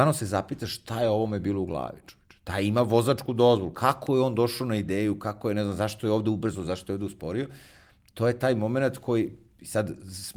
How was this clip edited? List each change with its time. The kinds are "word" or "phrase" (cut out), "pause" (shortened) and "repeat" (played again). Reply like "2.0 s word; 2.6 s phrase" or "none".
none